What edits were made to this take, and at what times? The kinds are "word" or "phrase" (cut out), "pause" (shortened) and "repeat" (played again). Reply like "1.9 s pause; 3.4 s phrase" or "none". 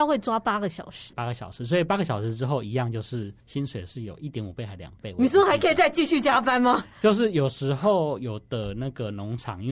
1.1 s word; 3.4 s pause